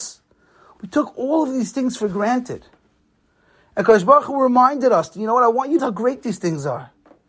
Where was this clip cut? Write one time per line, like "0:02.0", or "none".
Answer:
0:05.8